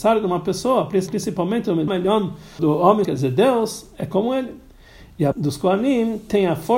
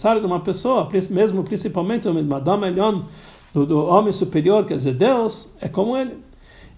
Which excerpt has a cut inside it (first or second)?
first